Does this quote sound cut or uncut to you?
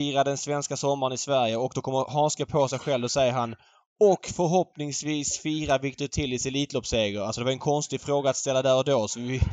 uncut